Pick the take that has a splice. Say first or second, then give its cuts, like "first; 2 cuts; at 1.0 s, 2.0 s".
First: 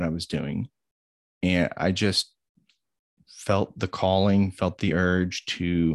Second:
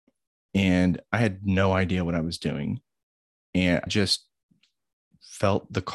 second; 1 cut; at 3.9 s